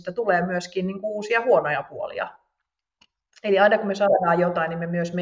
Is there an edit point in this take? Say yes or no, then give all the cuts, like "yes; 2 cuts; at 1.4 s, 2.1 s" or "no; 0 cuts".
no; 0 cuts